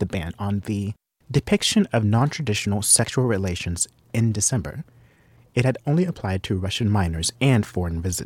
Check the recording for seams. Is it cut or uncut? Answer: uncut